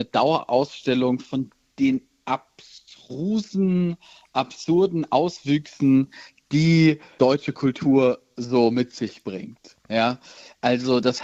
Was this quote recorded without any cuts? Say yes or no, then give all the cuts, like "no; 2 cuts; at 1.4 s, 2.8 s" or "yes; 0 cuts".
yes; 0 cuts